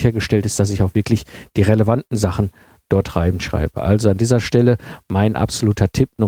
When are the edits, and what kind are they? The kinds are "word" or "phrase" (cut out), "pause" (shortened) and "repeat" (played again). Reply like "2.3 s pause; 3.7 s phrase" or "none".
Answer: none